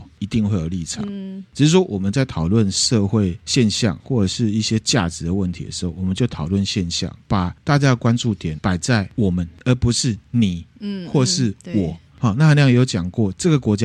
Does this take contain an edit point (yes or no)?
no